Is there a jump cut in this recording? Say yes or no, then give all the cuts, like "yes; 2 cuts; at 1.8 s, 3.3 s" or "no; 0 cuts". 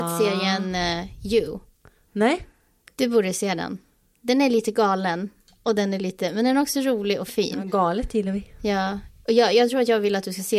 no; 0 cuts